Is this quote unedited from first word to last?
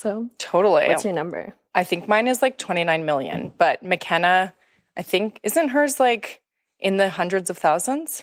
yes; 0 cuts

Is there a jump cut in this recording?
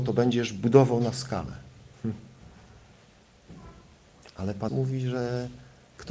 yes; 1 cut; at 4.7 s

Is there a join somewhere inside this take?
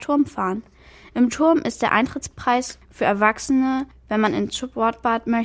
no; 0 cuts

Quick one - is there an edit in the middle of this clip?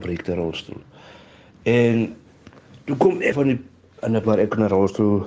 yes; 2 cuts; at 3.3 s, 4.2 s

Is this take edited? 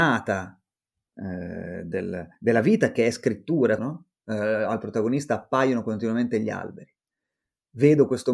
yes; 3 cuts; at 1.1 s, 2.3 s, 3.8 s

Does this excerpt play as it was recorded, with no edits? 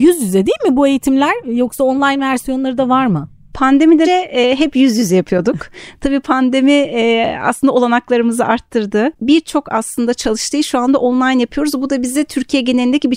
no; 1 cut; at 4.0 s

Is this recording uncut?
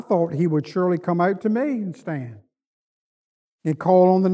yes; 0 cuts

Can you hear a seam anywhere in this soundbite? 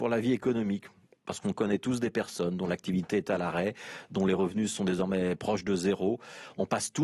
no; 0 cuts

